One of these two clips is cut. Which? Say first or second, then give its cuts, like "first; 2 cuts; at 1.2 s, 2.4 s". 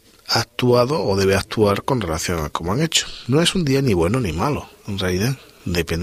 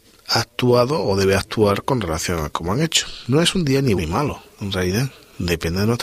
second; 1 cut; at 4.0 s